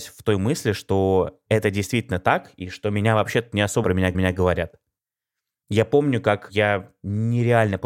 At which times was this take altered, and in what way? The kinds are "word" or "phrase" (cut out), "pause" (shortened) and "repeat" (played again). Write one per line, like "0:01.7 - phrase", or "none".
0:03.8 - phrase
0:04.1 - repeat